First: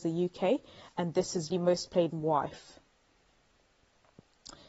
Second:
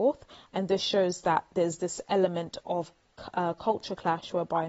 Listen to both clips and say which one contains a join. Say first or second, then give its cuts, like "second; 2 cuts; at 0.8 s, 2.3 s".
first; 2 cuts; at 1.5 s, 2.1 s